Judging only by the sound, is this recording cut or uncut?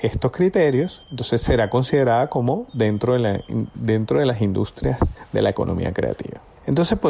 uncut